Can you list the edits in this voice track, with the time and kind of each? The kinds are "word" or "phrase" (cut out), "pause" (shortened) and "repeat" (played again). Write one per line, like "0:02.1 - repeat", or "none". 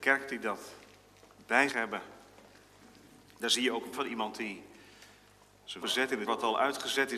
0:01.7 - word
0:03.9 - word
0:05.8 - word
0:06.3 - word